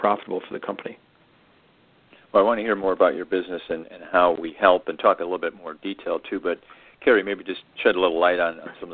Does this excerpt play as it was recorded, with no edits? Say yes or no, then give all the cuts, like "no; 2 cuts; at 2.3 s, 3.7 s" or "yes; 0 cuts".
yes; 0 cuts